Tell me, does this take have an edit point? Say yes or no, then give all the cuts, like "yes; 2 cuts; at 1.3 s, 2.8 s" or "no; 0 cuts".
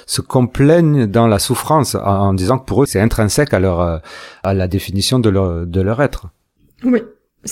no; 0 cuts